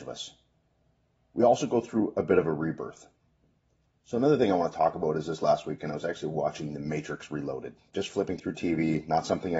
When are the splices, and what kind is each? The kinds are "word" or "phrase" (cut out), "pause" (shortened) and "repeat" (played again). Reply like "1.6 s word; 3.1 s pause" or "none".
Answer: none